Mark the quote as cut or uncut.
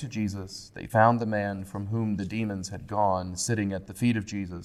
uncut